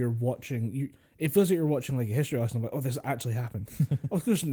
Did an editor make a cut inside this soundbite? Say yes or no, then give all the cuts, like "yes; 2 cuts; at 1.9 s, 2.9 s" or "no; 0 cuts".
no; 0 cuts